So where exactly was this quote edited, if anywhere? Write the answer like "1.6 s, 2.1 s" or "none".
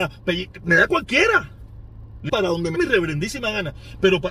2.3 s, 2.7 s